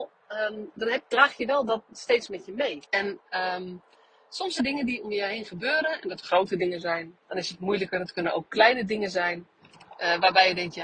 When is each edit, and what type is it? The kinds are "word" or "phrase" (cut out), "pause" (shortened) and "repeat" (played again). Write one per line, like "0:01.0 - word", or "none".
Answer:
0:02.8 - pause
0:04.6 - word
0:06.2 - word
0:07.2 - pause